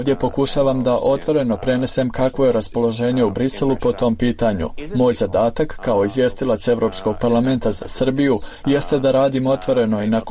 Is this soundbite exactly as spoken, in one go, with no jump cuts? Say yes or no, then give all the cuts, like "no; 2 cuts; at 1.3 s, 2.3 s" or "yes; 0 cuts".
yes; 0 cuts